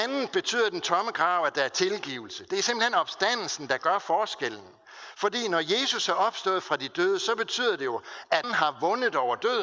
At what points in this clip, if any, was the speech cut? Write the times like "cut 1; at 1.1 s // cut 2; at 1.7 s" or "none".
cut 1; at 8.4 s